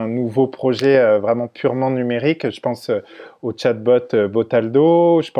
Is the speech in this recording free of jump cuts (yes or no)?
yes